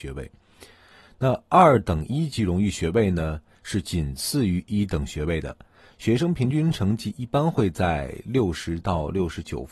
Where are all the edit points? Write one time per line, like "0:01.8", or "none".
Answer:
none

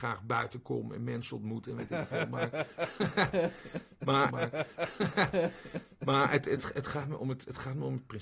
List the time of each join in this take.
0:04.3

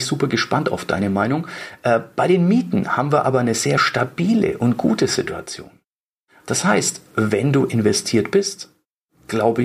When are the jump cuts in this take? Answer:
none

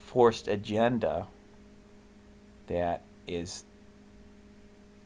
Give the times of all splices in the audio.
0:03.1

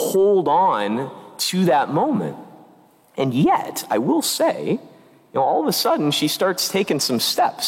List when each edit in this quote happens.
none

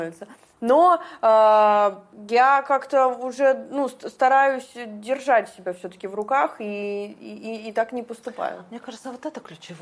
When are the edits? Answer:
none

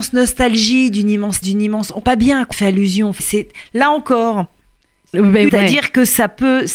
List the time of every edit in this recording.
0:01.4
0:02.0
0:02.5
0:03.2
0:05.1
0:05.5

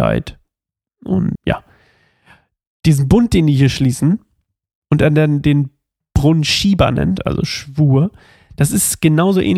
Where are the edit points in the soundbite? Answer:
0:01.3

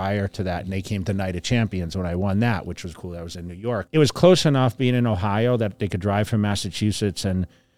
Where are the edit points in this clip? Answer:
0:02.9
0:03.9

